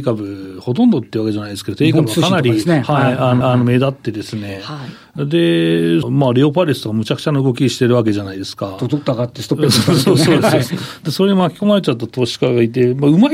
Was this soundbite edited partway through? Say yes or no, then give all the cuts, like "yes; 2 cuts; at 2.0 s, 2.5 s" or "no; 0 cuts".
yes; 2 cuts; at 3.4 s, 6.0 s